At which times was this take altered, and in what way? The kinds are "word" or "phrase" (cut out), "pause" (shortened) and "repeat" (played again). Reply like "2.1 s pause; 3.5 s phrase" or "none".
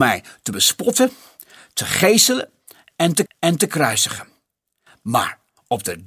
3.3 s repeat